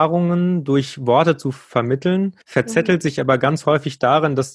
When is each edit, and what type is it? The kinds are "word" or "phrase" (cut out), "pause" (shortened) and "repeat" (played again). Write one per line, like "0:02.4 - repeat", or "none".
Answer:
0:02.4 - pause